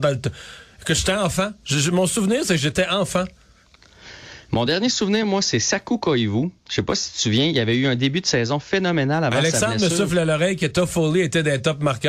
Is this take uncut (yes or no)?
yes